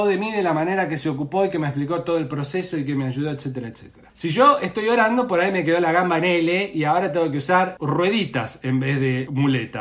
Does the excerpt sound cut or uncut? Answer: uncut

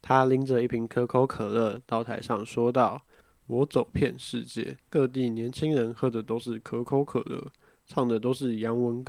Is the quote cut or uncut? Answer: cut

